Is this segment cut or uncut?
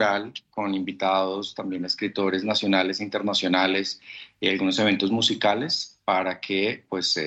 uncut